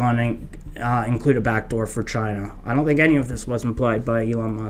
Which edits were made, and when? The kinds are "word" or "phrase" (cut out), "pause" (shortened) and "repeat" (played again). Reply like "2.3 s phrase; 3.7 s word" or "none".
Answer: none

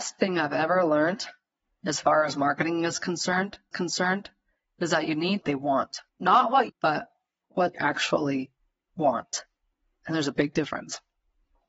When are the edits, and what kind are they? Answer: 1.6 s pause; 3.7 s repeat; 5.4 s phrase; 6.1 s pause; 6.7 s phrase; 7.7 s word

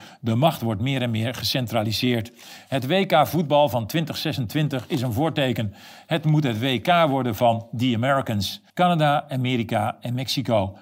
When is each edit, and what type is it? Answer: 8.7 s pause

